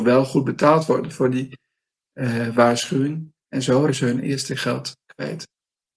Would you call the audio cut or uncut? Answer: cut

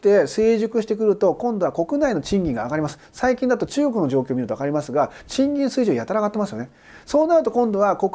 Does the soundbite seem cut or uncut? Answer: uncut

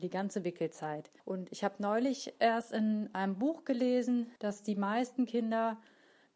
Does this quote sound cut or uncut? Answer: cut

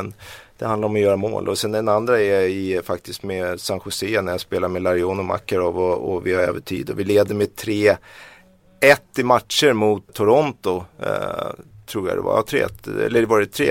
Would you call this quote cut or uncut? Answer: cut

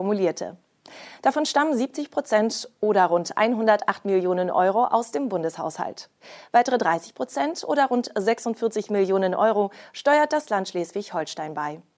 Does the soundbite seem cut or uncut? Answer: uncut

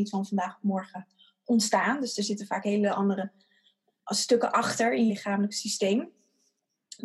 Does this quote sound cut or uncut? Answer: cut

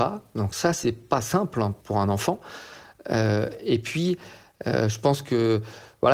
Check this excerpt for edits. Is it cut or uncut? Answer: uncut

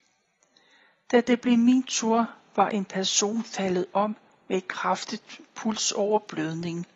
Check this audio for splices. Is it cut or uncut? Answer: uncut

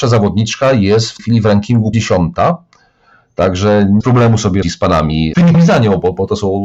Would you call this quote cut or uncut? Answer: cut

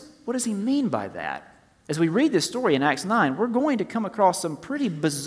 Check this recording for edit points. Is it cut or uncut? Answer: uncut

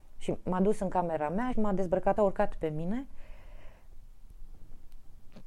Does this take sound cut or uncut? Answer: cut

